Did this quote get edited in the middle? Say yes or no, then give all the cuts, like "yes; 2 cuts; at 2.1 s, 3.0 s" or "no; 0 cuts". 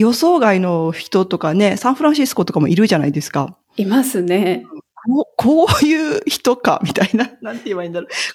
yes; 1 cut; at 3.6 s